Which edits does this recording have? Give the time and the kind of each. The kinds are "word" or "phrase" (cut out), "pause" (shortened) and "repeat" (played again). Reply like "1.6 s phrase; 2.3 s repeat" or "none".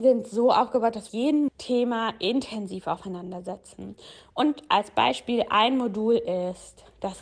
1.1 s phrase; 1.5 s phrase